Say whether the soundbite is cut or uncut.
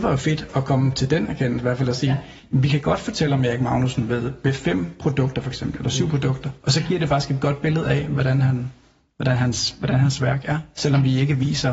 uncut